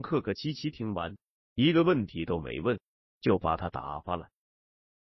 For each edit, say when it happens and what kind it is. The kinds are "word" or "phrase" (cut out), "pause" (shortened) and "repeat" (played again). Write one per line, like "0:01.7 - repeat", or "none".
none